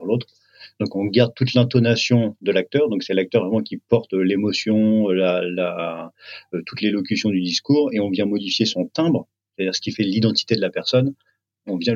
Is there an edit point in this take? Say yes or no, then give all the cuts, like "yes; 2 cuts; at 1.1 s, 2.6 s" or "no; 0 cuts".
no; 0 cuts